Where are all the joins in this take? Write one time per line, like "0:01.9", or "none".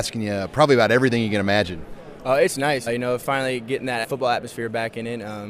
0:02.9
0:04.0